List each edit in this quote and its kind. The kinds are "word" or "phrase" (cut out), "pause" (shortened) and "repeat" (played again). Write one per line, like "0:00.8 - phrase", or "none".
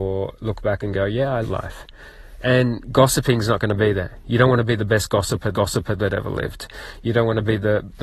0:01.4 - phrase
0:05.5 - repeat